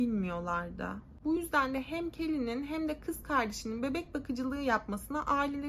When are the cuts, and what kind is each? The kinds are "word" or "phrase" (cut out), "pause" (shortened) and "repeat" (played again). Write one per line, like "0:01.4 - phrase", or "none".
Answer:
none